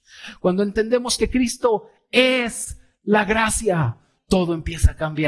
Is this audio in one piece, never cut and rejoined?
yes; 0 cuts

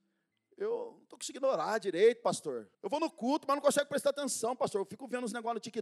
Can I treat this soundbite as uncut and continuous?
no; 1 cut; at 2.7 s

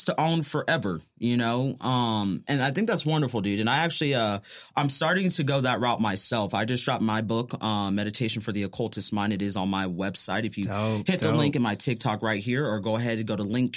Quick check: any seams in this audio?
no; 0 cuts

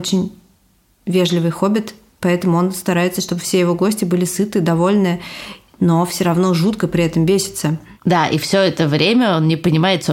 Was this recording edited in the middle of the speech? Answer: no; 0 cuts

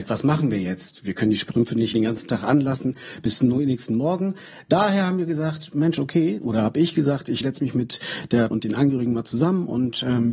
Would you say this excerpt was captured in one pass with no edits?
no; 3 cuts; at 1.9 s, 7.4 s, 8.5 s

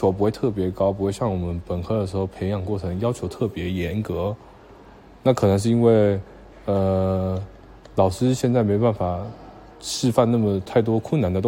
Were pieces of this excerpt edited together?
no; 0 cuts

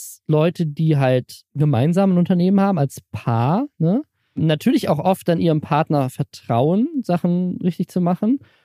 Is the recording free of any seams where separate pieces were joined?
yes; 0 cuts

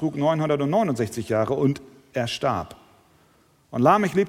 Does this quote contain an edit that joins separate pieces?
no; 0 cuts

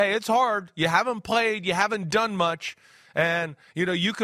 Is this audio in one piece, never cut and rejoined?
yes; 0 cuts

